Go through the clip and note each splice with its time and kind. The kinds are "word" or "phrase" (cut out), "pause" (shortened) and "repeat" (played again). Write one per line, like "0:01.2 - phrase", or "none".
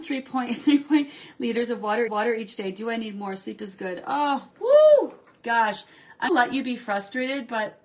0:02.1 - repeat
0:04.5 - pause
0:06.3 - word